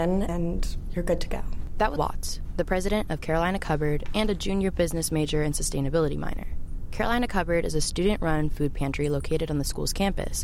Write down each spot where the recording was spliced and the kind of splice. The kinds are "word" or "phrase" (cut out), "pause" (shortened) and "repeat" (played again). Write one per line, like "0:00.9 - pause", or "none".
0:02.0 - word